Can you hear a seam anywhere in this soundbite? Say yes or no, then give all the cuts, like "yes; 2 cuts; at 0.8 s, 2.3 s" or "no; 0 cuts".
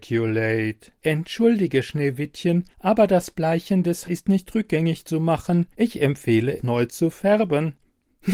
yes; 5 cuts; at 1.0 s, 2.7 s, 4.0 s, 5.7 s, 6.6 s